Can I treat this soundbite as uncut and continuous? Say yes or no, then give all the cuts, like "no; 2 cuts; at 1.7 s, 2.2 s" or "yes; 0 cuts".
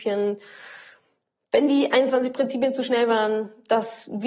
yes; 0 cuts